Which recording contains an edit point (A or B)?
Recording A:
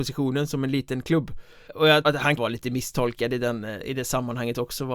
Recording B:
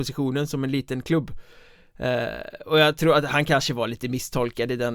A